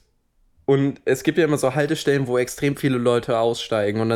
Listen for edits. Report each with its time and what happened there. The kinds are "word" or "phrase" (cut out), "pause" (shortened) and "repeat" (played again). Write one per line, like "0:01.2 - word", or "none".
none